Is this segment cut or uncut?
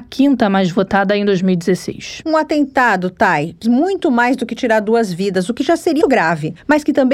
cut